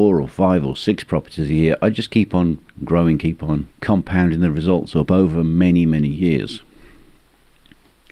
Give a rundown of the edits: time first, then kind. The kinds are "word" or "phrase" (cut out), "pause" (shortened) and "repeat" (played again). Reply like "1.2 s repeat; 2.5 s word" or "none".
none